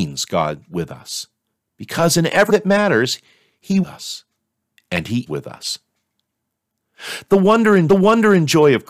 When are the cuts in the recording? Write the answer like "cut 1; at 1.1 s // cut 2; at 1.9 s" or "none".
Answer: cut 1; at 1.6 s // cut 2; at 2.5 s // cut 3; at 3.8 s // cut 4; at 5.3 s // cut 5; at 7.9 s